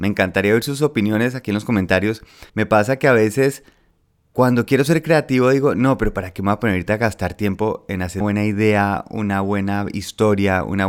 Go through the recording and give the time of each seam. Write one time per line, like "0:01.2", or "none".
0:02.5
0:04.0
0:08.2